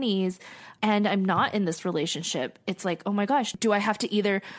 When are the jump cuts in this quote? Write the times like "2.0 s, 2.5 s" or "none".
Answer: none